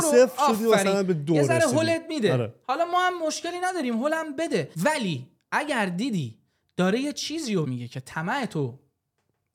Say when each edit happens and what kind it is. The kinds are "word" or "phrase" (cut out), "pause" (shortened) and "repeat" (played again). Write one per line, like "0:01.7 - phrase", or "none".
0:04.7 - pause
0:07.6 - word